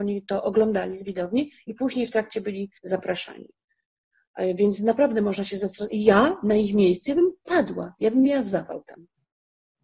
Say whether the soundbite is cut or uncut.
cut